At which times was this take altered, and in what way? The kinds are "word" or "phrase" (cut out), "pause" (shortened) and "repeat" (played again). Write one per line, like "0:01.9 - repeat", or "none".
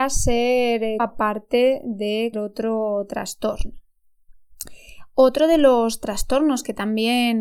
0:01.0 - word
0:02.3 - word